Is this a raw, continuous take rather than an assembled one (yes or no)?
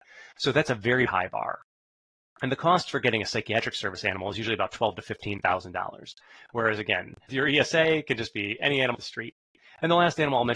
no